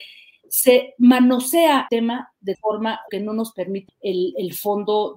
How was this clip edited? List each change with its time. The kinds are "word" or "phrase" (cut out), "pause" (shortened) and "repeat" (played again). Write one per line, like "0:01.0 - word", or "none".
0:01.9 - word
0:02.5 - word
0:03.1 - word
0:03.9 - word